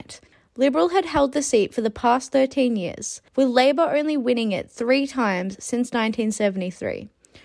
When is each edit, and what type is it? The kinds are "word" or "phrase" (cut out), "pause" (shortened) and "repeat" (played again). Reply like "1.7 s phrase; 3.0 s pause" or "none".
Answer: 3.3 s pause